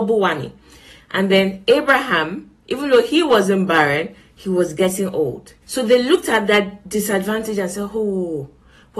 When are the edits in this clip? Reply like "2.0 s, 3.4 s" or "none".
2.6 s, 5.6 s